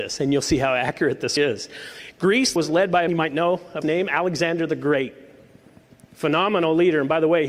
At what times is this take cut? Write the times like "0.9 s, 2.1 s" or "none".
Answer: 1.4 s, 2.6 s, 3.1 s, 3.8 s